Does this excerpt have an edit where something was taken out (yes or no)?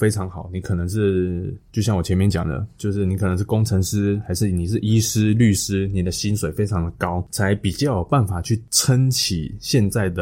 no